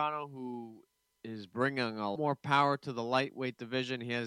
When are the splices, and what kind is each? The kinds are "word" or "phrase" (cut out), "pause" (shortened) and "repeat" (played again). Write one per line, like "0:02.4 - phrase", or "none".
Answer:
0:00.9 - pause
0:02.2 - word